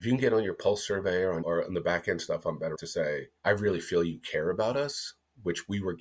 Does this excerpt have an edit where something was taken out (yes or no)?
yes